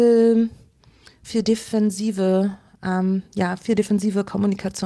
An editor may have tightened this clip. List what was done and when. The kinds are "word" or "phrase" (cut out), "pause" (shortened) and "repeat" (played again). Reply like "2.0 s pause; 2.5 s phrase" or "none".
none

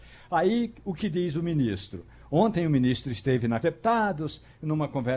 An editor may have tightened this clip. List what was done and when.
3.6 s phrase

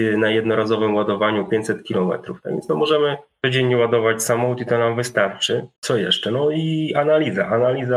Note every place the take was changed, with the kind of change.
5.8 s pause

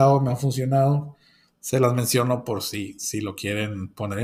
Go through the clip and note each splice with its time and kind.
none

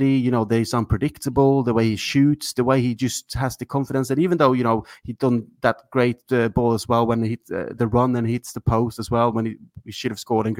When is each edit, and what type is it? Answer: 7.8 s word

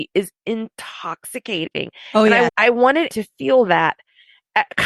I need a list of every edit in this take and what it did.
2.5 s word; 3.1 s word

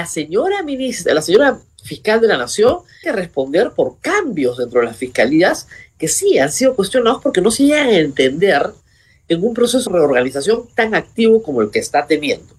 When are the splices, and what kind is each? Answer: 1.6 s word; 3.0 s word; 9.9 s word

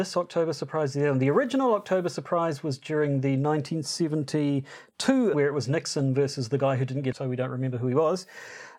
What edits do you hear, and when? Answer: 5.3 s word; 7.1 s phrase

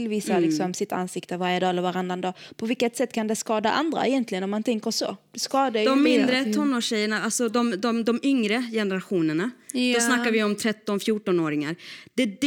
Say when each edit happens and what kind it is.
none

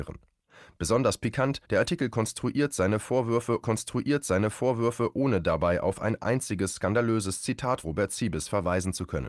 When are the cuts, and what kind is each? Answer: 1.6 s pause; 3.6 s repeat; 7.8 s word

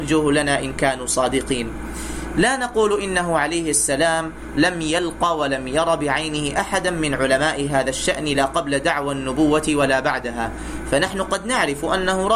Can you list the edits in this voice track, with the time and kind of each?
none

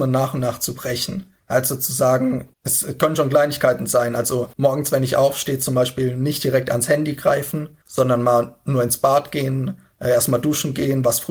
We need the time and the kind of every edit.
1.4 s pause; 2.5 s pause; 4.5 s pause; 7.8 s pause

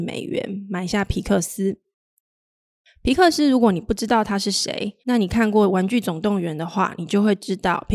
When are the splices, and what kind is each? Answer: 5.0 s pause

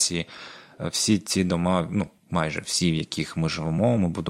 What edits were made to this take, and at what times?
none

